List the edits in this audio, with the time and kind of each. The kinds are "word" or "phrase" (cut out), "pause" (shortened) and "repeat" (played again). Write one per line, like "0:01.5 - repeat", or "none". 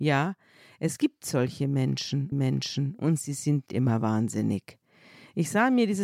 0:02.3 - repeat
0:03.7 - word